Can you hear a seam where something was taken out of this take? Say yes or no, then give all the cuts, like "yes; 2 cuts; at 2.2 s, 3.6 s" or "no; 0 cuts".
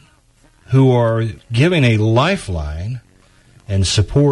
no; 0 cuts